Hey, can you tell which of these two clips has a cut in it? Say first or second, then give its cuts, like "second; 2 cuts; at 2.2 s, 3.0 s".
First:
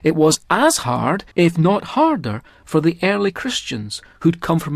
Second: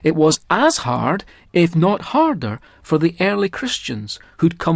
first; 1 cut; at 1.3 s